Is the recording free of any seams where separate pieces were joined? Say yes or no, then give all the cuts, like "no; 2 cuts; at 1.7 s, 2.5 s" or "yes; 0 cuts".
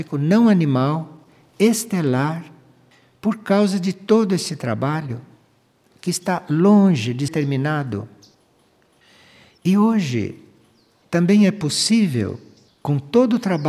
no; 1 cut; at 7.3 s